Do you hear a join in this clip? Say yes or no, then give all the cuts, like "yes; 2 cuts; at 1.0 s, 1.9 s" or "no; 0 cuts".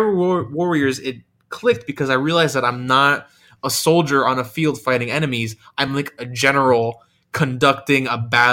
no; 0 cuts